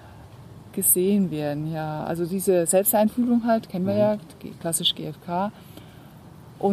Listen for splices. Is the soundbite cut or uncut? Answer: uncut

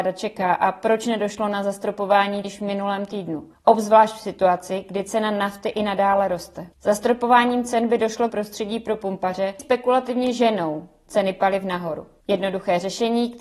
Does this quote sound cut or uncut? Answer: cut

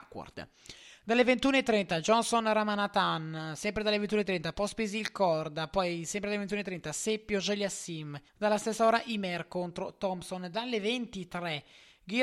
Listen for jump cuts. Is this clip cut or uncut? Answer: cut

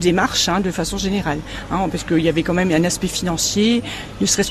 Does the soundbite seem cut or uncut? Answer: uncut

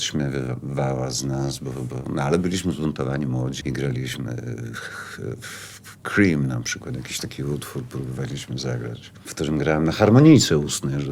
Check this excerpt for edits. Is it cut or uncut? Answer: cut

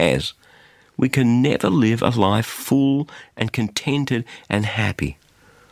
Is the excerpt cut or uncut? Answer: uncut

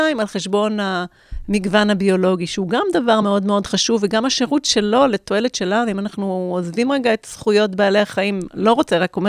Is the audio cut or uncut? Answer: uncut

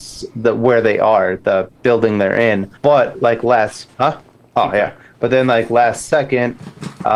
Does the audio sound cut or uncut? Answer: cut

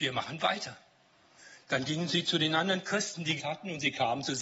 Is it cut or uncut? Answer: cut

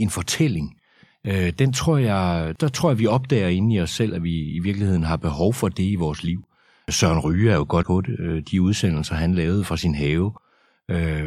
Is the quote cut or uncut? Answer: cut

